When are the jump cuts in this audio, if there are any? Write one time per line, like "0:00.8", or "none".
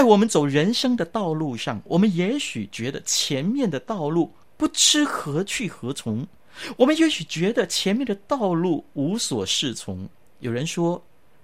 0:04.4
0:10.3